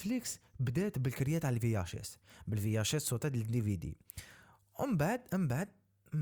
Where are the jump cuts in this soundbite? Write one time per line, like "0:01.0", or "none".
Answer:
none